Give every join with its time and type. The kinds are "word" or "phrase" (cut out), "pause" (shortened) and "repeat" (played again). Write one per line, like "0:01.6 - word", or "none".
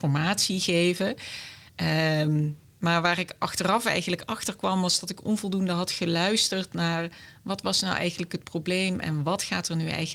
none